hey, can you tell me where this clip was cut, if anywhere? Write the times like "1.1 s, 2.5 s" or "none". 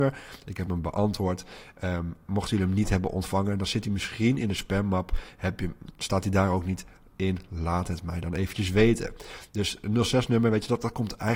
none